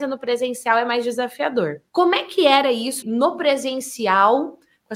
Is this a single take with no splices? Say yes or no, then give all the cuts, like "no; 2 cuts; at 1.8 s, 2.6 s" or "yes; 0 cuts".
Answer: no; 2 cuts; at 1.9 s, 3.0 s